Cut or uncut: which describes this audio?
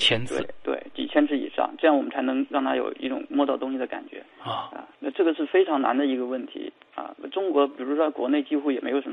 cut